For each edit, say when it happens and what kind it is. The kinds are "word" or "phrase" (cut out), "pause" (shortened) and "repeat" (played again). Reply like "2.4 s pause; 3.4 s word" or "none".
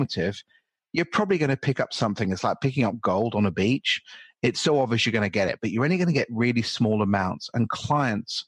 none